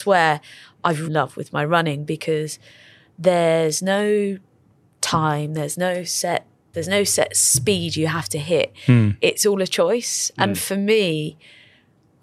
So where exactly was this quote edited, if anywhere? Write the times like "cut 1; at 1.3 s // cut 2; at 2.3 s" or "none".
cut 1; at 1.0 s // cut 2; at 6.7 s